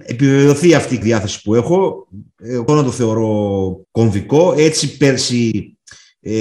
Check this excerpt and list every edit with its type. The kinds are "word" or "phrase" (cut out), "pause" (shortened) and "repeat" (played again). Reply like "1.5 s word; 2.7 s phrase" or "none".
1.0 s word; 2.7 s word; 3.8 s pause